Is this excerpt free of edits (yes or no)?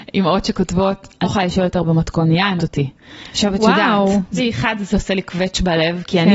no